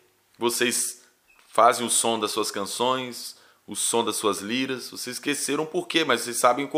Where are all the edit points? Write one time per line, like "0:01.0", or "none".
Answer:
none